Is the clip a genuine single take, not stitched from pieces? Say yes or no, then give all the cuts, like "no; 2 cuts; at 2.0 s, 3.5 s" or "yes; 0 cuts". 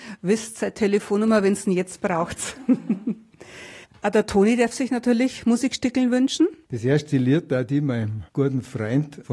no; 1 cut; at 6.6 s